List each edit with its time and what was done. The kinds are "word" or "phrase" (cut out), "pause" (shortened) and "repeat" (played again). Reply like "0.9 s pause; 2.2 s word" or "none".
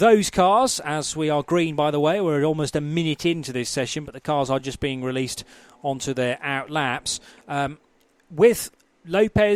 none

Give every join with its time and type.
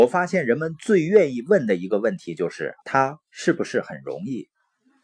2.8 s pause

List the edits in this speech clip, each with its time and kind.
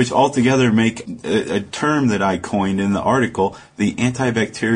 1.1 s phrase

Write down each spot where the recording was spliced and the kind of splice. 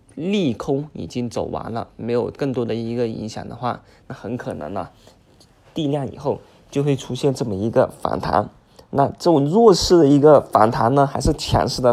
none

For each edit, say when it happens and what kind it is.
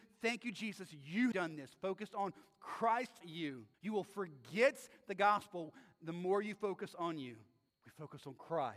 1.3 s word; 3.2 s word; 3.7 s pause; 7.7 s pause

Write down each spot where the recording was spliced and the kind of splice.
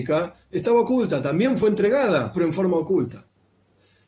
none

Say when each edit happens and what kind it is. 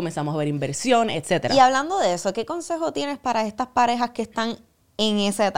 none

